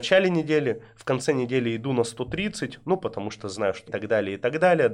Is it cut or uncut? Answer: cut